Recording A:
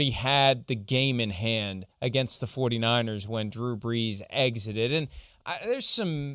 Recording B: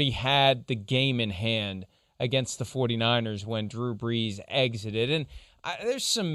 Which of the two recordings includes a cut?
A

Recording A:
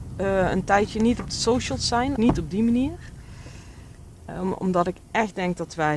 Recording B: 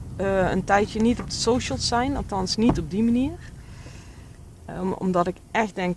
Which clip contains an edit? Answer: A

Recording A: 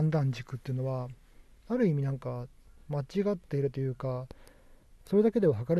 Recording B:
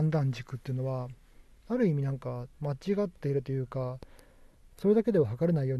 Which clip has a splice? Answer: B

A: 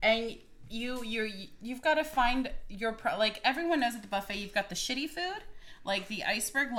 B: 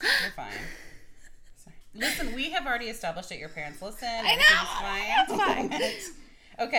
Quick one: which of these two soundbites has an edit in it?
B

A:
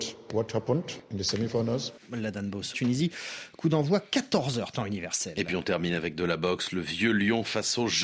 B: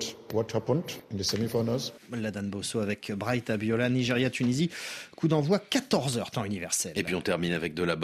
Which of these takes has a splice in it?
A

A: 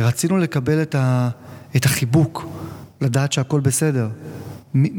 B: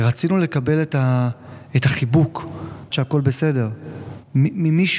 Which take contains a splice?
B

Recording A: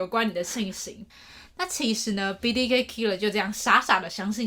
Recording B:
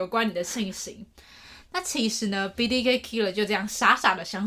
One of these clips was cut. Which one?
A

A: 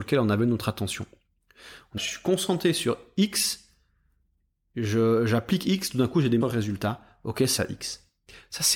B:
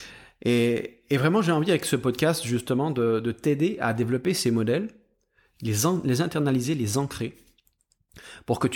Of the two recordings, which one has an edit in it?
A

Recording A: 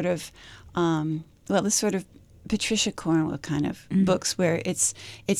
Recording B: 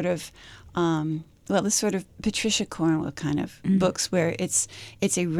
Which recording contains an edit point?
B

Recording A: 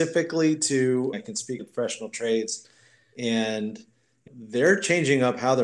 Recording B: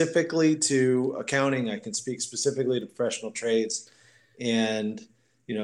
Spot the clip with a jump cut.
A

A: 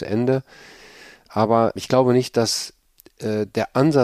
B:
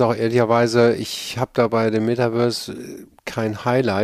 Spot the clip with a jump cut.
A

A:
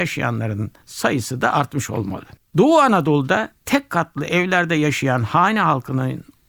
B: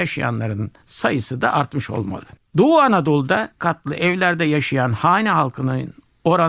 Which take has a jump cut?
B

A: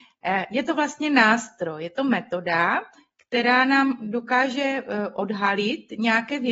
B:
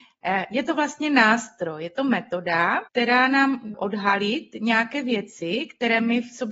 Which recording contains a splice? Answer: B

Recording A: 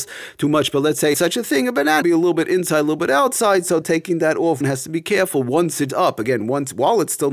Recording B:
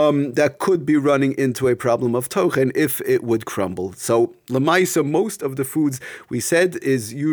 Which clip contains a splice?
A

